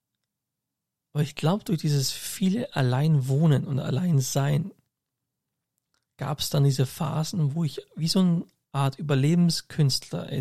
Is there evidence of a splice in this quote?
no; 0 cuts

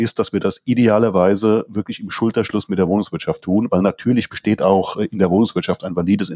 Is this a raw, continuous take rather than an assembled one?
yes; 0 cuts

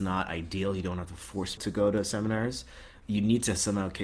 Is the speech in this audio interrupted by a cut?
yes; 2 cuts; at 1.6 s, 3.0 s

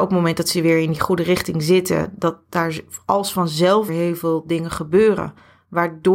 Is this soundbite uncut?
no; 1 cut; at 3.9 s

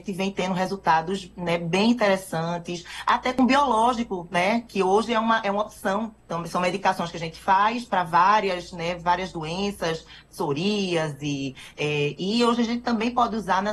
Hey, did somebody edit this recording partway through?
yes; 1 cut; at 6.2 s

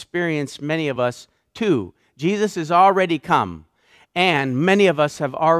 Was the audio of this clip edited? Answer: no; 0 cuts

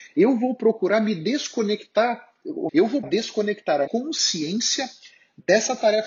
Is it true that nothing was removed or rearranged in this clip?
no; 3 cuts; at 2.7 s, 3.0 s, 3.9 s

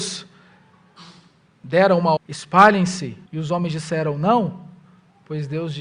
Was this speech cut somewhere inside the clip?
yes; 2 cuts; at 2.2 s, 3.3 s

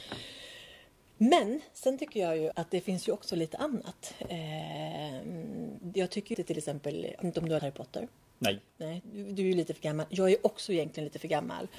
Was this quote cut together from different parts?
yes; 4 cuts; at 2.5 s, 6.3 s, 7.2 s, 7.6 s

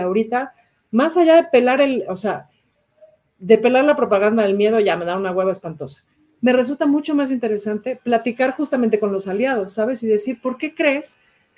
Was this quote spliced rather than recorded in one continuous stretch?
no; 0 cuts

